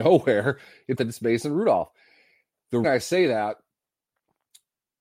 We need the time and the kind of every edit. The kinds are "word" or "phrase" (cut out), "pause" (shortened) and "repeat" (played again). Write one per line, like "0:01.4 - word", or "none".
0:01.0 - phrase
0:02.8 - word